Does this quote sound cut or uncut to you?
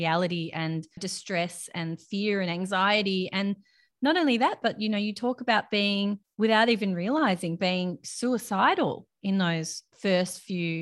uncut